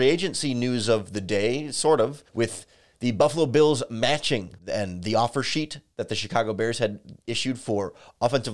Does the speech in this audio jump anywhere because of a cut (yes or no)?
yes